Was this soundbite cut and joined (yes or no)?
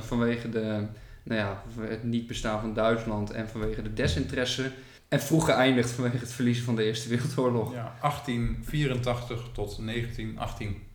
yes